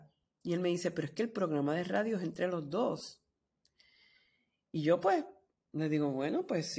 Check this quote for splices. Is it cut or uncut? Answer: uncut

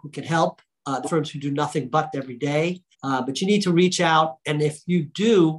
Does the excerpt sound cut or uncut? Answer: cut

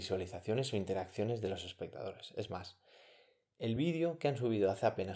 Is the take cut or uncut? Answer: uncut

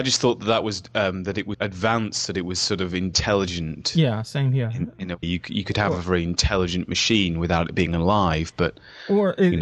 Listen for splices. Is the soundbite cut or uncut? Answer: cut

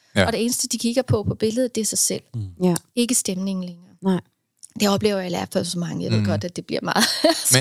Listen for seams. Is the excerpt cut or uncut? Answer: uncut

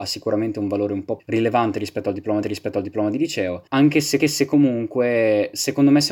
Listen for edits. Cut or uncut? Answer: cut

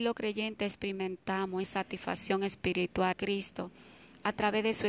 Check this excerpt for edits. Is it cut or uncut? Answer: cut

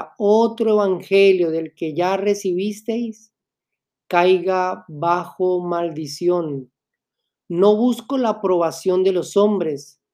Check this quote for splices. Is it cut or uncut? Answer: uncut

